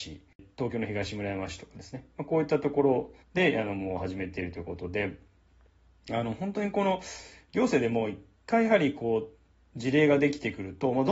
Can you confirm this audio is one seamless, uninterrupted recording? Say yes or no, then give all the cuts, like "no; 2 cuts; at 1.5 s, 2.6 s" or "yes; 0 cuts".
no; 1 cut; at 3.2 s